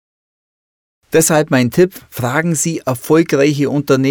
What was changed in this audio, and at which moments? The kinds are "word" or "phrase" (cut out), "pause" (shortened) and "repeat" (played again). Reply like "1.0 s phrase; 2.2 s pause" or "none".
none